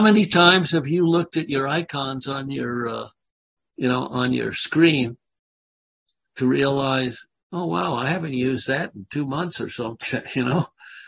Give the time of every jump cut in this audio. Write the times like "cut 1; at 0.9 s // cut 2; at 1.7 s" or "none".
cut 1; at 10.0 s